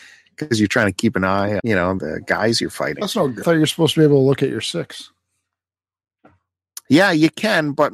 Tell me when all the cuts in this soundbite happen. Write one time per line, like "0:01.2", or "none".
0:01.6
0:02.0
0:03.0
0:03.4